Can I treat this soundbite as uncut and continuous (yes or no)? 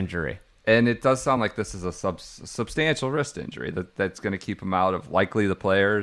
yes